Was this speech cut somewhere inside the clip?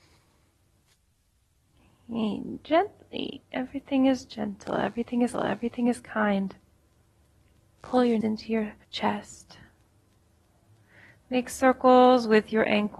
yes; 3 cuts; at 5.3 s, 8.2 s, 8.8 s

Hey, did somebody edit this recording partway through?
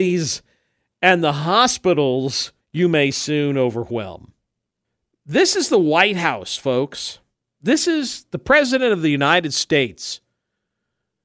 yes; 2 cuts; at 2.6 s, 4.8 s

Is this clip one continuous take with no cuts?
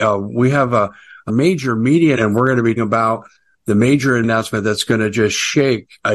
no; 4 cuts; at 1.3 s, 2.2 s, 2.8 s, 4.2 s

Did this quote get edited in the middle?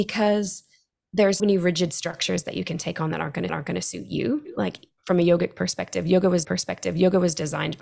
yes; 3 cuts; at 1.4 s, 3.5 s, 6.4 s

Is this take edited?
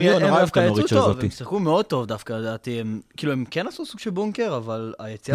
no; 0 cuts

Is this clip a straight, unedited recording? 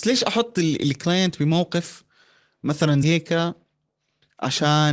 no; 1 cut; at 3.0 s

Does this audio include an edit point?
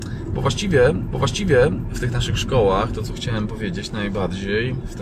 yes; 1 cut; at 1.1 s

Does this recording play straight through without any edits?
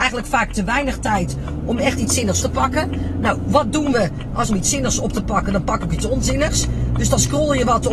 no; 3 cuts; at 2.4 s, 4.5 s, 5.9 s

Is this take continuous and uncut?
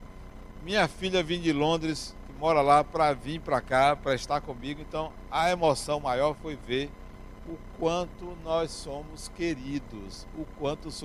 yes; 0 cuts

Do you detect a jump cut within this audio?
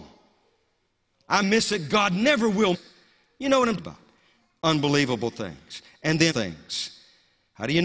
yes; 4 cuts; at 1.4 s, 2.7 s, 3.8 s, 6.3 s

